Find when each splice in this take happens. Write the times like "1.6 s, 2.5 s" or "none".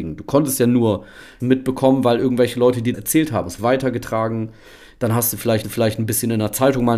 1.4 s, 2.9 s, 3.6 s, 5.6 s